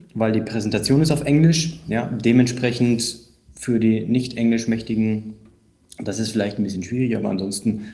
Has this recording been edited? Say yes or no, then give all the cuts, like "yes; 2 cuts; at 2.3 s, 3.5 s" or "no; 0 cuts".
no; 0 cuts